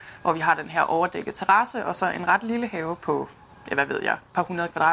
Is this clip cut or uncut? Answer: uncut